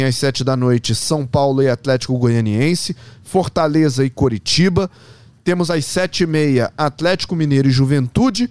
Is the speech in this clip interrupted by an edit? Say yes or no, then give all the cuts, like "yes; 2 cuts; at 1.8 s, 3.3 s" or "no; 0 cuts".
no; 0 cuts